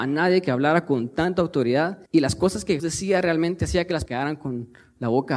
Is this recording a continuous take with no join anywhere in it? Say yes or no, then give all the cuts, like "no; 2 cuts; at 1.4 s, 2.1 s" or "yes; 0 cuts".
no; 3 cuts; at 2.1 s, 2.8 s, 4.1 s